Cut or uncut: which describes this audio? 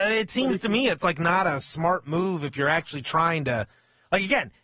uncut